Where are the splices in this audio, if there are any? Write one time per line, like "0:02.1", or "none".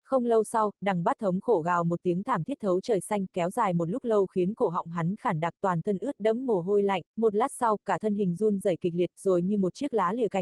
0:07.1